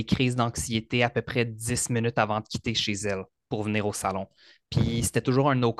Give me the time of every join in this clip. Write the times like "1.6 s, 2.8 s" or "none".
none